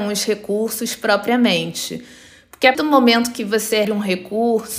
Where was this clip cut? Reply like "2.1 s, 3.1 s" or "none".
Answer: 2.7 s, 3.8 s